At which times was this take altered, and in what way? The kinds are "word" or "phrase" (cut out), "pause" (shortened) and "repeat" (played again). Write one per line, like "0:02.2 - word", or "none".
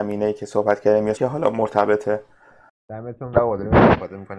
0:01.2 - word
0:03.3 - word